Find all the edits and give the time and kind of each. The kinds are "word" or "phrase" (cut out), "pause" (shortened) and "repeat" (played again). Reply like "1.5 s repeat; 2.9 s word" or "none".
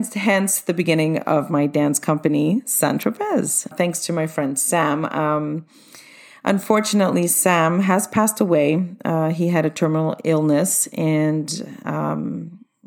3.7 s word